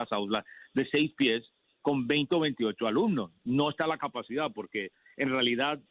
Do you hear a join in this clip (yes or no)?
no